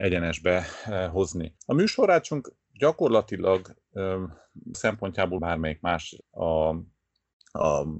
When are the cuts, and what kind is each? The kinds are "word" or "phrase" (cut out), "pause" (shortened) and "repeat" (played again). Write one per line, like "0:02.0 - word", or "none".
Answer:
0:01.6 - pause
0:04.7 - word
0:05.4 - phrase
0:06.2 - phrase

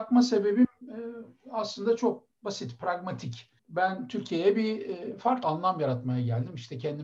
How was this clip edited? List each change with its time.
0:02.3 - pause
0:03.6 - pause
0:05.4 - phrase

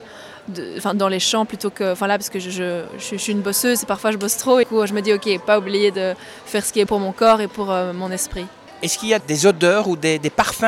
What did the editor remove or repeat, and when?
0:04.6 - phrase
0:06.9 - word
0:09.2 - word

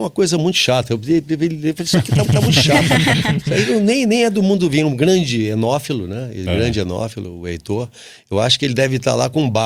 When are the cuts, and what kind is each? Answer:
0:02.2 - repeat

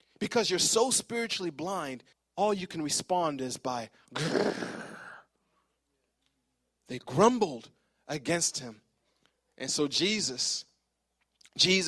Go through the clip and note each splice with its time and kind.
0:02.1 - pause

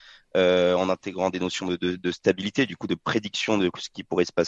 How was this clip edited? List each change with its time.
none

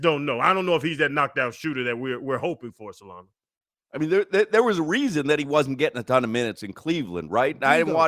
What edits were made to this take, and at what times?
none

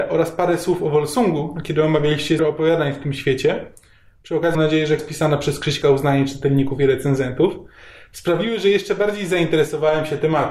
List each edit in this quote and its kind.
0:02.4 - word
0:04.5 - word
0:05.0 - word
0:05.8 - word

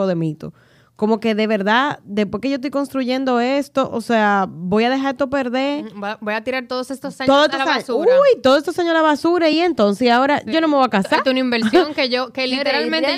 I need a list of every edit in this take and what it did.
none

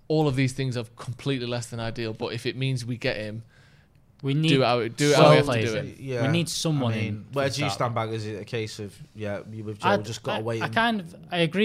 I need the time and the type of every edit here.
none

